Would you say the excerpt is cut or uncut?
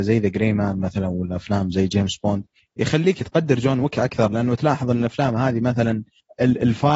uncut